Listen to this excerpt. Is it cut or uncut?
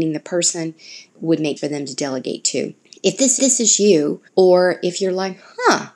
cut